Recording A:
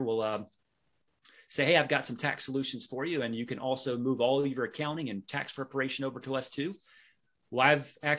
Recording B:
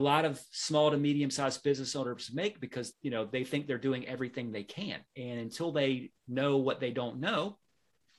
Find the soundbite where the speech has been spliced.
B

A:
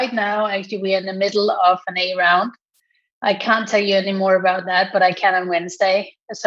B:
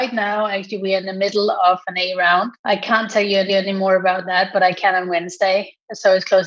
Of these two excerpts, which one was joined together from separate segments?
B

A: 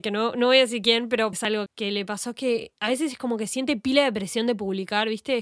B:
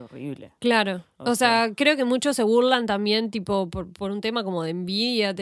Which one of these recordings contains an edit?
A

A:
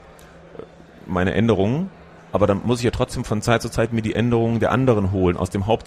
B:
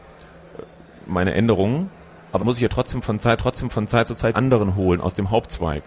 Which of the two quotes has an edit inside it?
B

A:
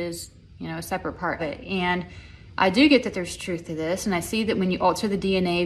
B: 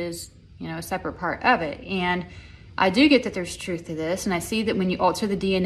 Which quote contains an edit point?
A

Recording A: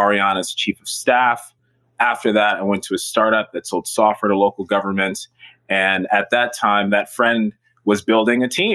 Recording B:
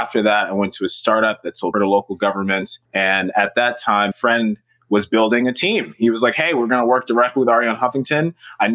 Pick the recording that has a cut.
B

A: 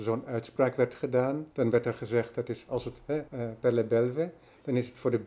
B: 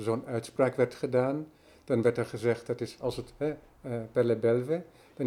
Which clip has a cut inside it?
A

